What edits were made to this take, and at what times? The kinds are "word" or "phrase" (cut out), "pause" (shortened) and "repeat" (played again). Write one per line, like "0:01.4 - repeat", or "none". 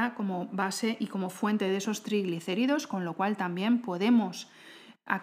none